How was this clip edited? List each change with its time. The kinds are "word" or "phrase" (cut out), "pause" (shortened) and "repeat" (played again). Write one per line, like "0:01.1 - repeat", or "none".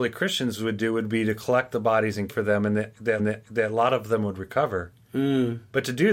0:02.3 - word
0:03.2 - repeat